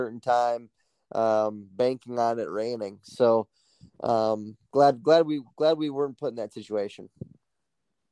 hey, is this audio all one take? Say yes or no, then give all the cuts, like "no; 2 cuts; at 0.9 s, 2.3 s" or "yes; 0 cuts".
yes; 0 cuts